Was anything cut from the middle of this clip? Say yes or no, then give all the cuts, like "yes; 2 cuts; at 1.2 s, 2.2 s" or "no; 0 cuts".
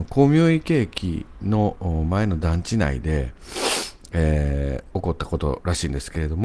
no; 0 cuts